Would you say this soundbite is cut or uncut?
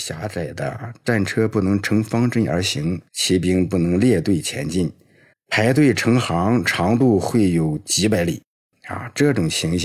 cut